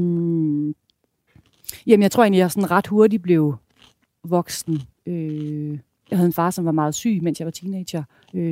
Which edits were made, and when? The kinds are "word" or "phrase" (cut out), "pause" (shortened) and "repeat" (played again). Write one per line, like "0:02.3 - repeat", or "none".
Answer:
none

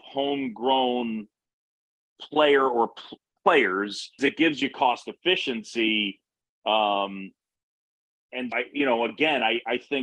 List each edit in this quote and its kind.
0:04.2 - word
0:08.5 - word

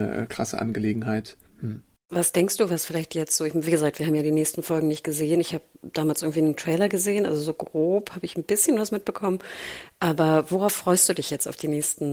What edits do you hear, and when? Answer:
none

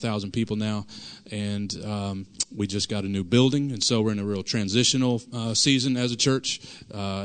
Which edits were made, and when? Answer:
none

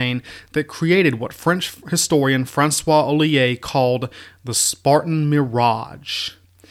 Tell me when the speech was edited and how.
none

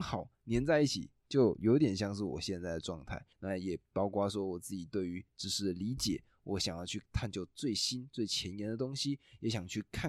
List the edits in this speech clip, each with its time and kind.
0:03.3 - pause

